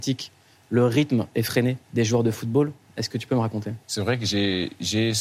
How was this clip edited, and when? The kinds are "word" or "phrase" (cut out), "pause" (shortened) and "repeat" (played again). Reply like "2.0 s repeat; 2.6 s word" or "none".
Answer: 1.8 s pause; 3.8 s pause